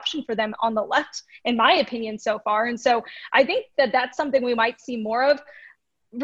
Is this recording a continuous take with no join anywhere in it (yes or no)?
yes